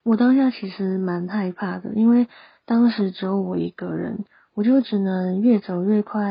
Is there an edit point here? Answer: no; 0 cuts

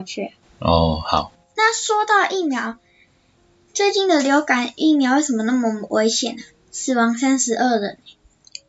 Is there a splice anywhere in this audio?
no; 0 cuts

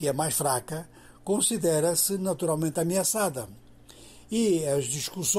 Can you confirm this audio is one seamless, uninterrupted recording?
yes; 0 cuts

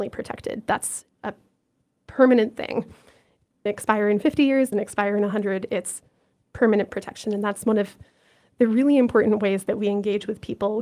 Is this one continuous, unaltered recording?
no; 2 cuts; at 3.7 s, 4.7 s

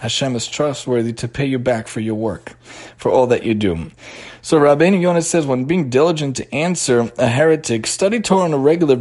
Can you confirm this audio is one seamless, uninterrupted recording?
yes; 0 cuts

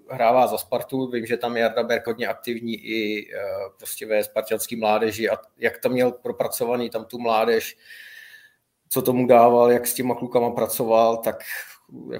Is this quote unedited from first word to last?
no; 1 cut; at 2.1 s

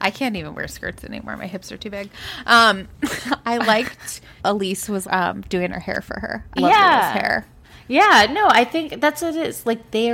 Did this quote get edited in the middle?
yes; 3 cuts; at 4.4 s, 5.0 s, 6.6 s

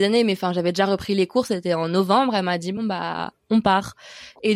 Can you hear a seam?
no; 0 cuts

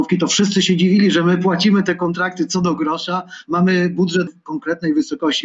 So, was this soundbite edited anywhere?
yes; 1 cut; at 4.3 s

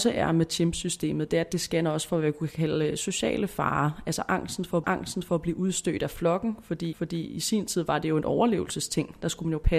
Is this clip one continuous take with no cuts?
no; 2 cuts; at 4.8 s, 6.9 s

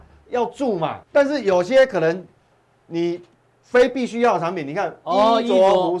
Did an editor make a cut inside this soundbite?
yes; 2 cuts; at 1.0 s, 3.3 s

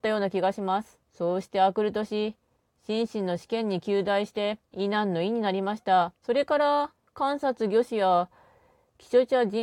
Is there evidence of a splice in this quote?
yes; 3 cuts; at 1.0 s, 4.6 s, 6.2 s

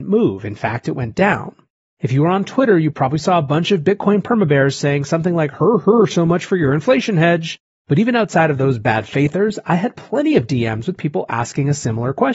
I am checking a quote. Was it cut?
no; 0 cuts

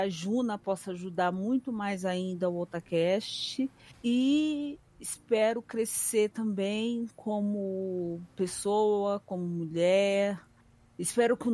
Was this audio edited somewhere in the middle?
no; 0 cuts

